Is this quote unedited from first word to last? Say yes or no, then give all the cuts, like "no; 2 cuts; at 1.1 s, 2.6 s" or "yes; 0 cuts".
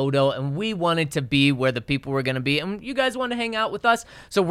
yes; 0 cuts